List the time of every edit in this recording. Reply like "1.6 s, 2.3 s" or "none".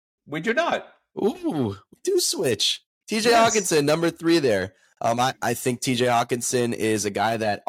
5.3 s

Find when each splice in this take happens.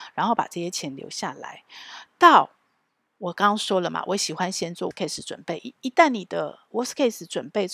4.9 s

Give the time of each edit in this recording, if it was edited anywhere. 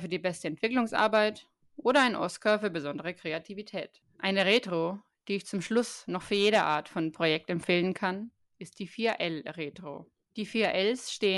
none

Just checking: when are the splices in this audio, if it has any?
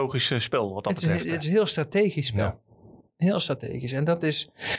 none

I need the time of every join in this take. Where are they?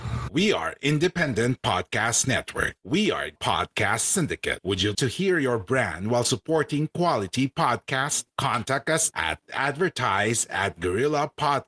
3.4 s, 4.9 s, 9.1 s

